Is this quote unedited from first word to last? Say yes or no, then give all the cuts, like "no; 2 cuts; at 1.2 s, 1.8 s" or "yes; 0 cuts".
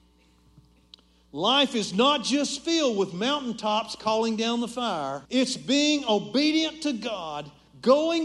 no; 1 cut; at 5.3 s